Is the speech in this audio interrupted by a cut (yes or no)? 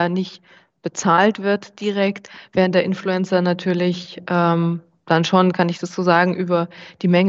no